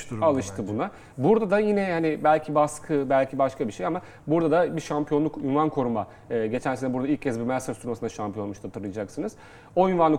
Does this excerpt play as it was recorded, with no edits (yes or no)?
yes